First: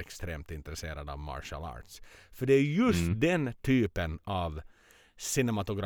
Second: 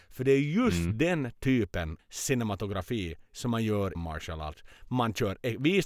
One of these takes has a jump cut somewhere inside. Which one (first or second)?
second